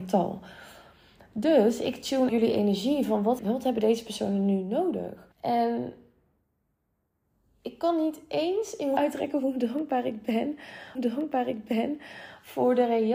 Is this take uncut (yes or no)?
no